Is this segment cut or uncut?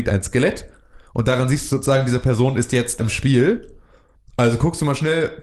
cut